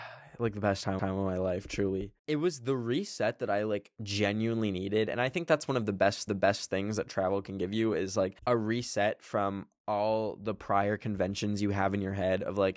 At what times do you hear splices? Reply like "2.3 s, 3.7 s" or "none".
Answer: 1.0 s, 2.2 s, 4.0 s, 6.3 s, 8.4 s